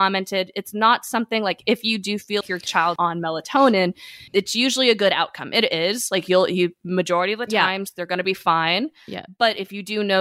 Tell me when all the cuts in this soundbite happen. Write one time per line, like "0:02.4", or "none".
0:02.4
0:03.0
0:04.3